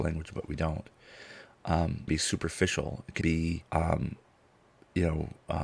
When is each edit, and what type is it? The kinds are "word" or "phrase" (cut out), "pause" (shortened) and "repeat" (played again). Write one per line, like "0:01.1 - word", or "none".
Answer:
0:02.1 - phrase
0:03.2 - word
0:03.7 - pause